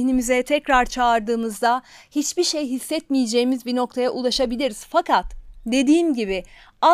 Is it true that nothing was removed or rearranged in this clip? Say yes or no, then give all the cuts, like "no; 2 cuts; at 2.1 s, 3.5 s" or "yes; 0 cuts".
yes; 0 cuts